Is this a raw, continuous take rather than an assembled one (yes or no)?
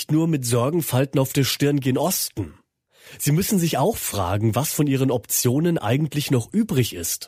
yes